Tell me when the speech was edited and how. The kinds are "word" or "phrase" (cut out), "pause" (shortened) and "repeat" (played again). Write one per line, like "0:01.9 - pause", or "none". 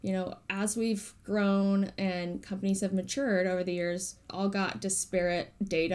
0:04.3 - word